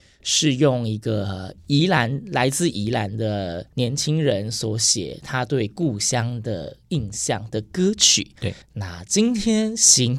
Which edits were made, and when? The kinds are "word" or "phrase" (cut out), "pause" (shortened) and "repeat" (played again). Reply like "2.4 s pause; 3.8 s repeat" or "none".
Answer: 8.6 s pause